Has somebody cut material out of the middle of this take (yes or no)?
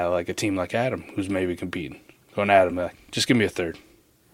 no